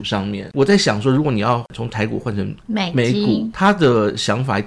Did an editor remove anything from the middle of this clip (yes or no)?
yes